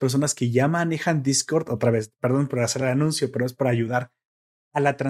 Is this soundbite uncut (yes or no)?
yes